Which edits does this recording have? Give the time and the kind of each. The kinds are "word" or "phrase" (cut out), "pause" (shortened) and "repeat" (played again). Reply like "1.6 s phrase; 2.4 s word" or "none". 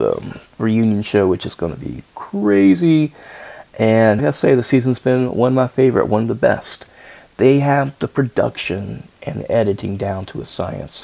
4.2 s word

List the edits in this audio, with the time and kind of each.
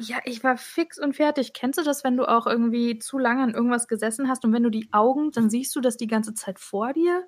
5.3 s word

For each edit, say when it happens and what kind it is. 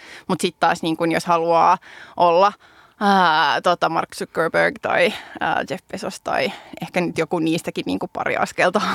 none

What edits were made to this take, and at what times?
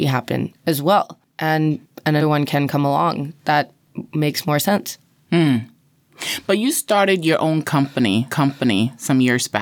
2.2 s word; 8.3 s repeat

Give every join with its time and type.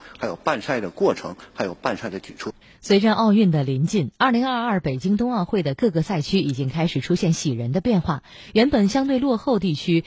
2.6 s pause

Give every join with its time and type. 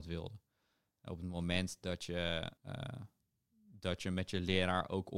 2.6 s pause

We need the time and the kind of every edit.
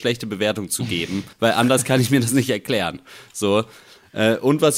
1.3 s pause

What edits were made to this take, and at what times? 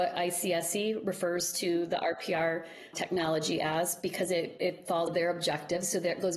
2.9 s word; 5.1 s phrase

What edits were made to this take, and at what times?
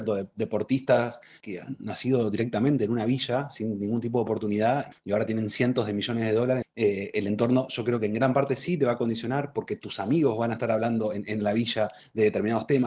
1.4 s word; 4.9 s word; 6.6 s word

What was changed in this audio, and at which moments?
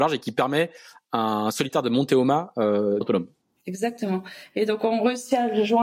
3.0 s word

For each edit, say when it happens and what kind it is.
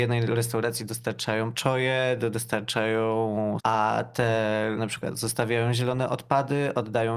1.5 s word; 2.3 s word; 3.6 s word; 4.8 s word

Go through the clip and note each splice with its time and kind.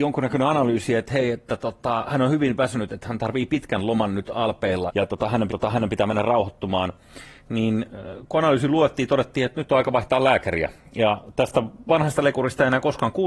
4.9 s word; 5.5 s repeat

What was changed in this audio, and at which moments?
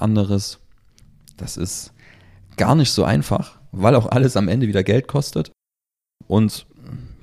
none

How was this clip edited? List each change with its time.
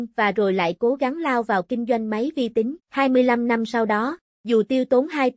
2.8 s pause

